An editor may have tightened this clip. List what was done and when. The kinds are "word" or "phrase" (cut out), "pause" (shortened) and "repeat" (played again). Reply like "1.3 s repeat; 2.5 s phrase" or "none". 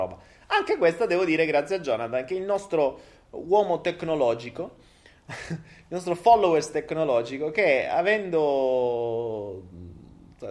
none